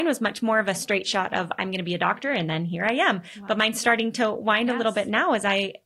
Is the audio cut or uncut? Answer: uncut